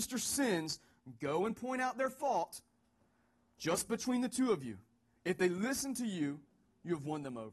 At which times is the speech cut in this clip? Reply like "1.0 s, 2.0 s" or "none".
none